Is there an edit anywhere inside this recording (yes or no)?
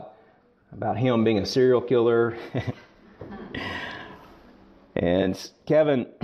no